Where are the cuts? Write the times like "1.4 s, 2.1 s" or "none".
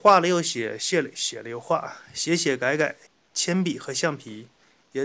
3.1 s